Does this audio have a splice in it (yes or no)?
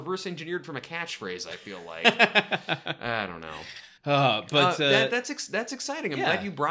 yes